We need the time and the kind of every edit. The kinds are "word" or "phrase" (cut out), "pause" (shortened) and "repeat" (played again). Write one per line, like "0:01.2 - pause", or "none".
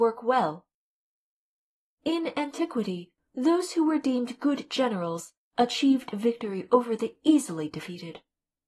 none